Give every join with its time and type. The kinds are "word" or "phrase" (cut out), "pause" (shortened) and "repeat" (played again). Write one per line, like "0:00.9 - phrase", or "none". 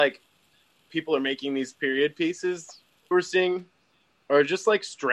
0:00.9 - word
0:03.1 - word